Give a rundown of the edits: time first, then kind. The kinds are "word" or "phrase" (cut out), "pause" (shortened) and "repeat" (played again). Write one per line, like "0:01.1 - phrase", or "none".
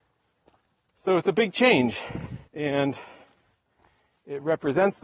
0:02.5 - pause